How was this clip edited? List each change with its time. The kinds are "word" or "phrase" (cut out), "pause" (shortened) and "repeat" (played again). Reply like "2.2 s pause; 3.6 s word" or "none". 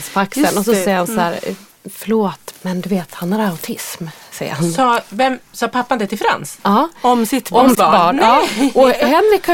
2.5 s word; 7.7 s word